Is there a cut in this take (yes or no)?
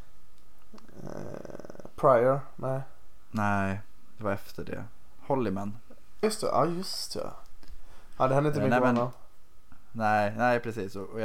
yes